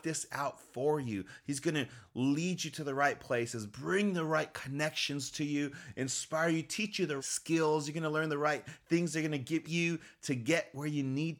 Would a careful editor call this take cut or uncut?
cut